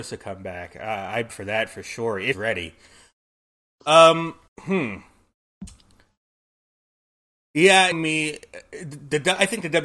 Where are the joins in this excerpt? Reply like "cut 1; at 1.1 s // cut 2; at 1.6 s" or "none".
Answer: cut 1; at 1.3 s // cut 2; at 2.3 s // cut 3; at 4.5 s // cut 4; at 7.9 s